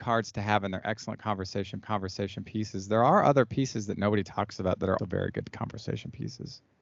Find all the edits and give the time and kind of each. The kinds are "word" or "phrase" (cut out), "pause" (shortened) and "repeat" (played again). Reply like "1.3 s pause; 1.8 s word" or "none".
1.8 s repeat; 5.0 s word